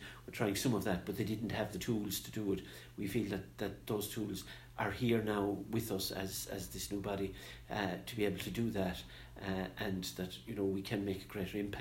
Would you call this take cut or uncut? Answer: uncut